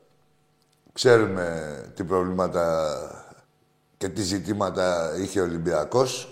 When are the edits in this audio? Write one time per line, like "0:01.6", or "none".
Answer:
0:03.4